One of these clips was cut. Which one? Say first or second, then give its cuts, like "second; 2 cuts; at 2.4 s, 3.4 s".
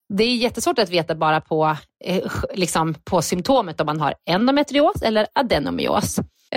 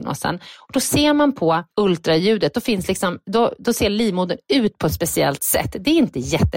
second; 1 cut; at 1.7 s